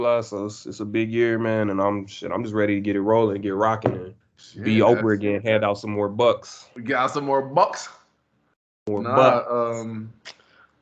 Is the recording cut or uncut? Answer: cut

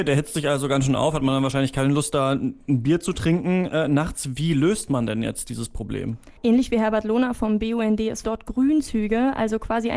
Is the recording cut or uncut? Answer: cut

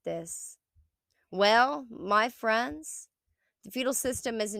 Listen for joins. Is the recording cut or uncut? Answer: uncut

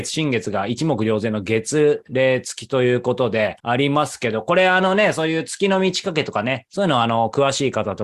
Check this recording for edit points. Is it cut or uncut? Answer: cut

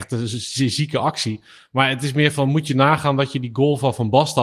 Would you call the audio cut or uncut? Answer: uncut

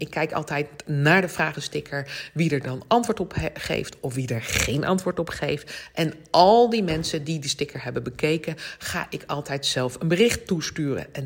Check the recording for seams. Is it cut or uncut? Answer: uncut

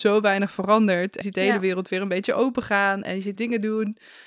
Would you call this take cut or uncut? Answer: cut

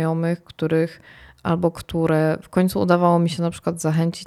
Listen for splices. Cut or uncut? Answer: uncut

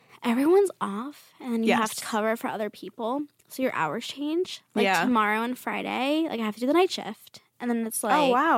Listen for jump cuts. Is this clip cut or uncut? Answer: cut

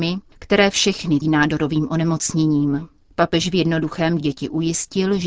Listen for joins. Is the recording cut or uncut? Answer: cut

